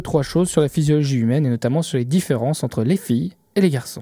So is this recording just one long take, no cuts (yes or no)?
yes